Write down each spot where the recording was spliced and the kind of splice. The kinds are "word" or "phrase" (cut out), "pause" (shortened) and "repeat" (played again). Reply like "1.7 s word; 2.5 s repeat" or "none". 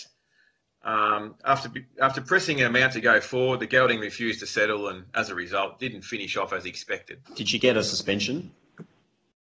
1.4 s pause; 7.3 s pause

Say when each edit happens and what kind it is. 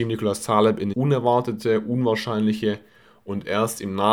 0.9 s phrase

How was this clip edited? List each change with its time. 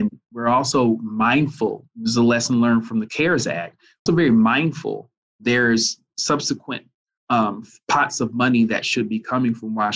4.1 s word

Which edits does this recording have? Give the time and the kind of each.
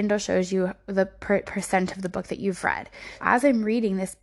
1.4 s word; 3.2 s word

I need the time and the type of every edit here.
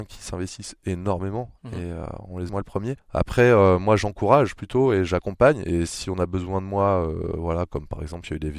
2.5 s phrase

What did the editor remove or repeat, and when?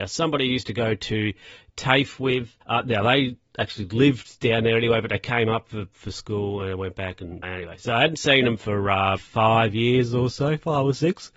2.6 s pause; 7.4 s word; 9.2 s word

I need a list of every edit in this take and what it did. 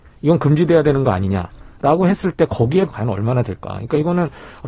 2.9 s phrase

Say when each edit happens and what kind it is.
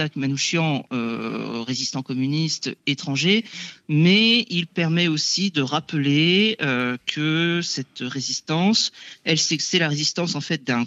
none

